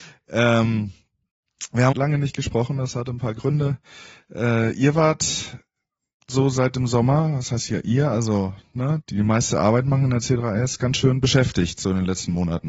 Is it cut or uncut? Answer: cut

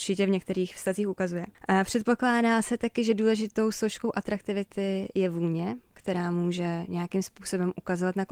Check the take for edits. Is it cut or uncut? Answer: uncut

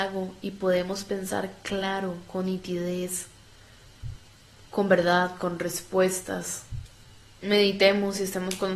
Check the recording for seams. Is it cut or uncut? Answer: uncut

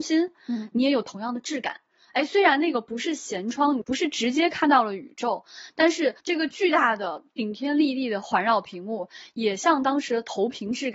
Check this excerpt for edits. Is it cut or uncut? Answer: cut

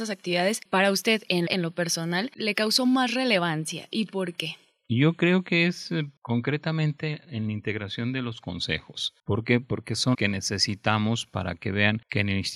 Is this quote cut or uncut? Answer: cut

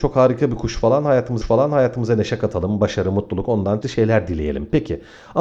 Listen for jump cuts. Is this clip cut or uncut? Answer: cut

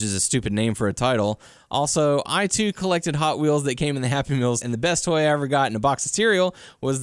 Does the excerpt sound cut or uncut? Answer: cut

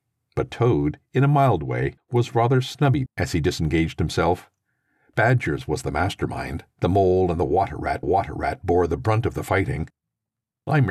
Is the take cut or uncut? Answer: cut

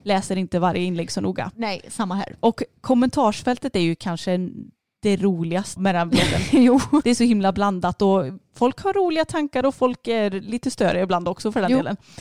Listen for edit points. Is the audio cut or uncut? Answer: cut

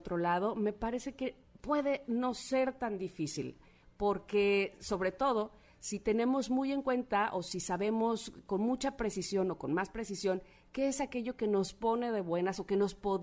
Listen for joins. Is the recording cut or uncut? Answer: uncut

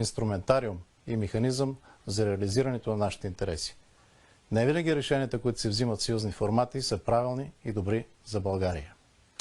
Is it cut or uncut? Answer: uncut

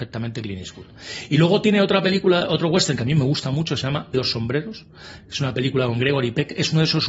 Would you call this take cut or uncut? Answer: cut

